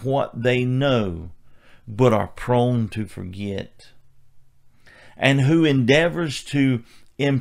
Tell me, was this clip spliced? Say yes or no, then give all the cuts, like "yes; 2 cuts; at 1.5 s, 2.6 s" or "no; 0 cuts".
no; 0 cuts